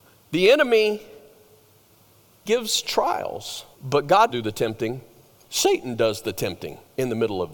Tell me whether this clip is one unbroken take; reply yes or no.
no